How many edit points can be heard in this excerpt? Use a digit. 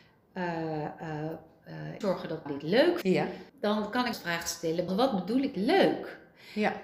7